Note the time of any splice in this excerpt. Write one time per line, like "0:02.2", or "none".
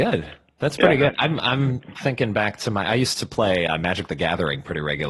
none